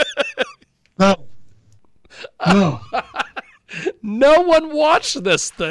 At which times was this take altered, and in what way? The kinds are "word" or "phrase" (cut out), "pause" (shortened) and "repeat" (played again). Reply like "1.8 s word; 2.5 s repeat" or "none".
none